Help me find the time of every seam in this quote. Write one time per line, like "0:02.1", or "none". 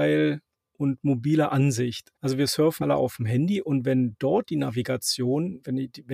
0:02.2
0:02.8